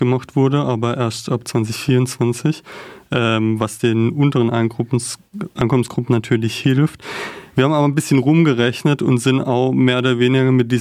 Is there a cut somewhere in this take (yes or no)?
no